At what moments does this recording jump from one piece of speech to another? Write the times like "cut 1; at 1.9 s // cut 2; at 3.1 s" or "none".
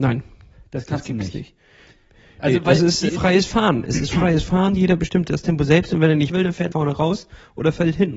cut 1; at 3.1 s // cut 2; at 6.3 s // cut 3; at 6.7 s